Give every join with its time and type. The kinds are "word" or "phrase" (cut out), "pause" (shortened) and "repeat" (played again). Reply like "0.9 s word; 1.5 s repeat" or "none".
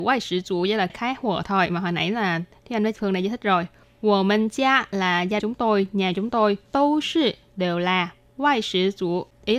3.0 s word; 3.8 s pause; 5.4 s word; 6.7 s pause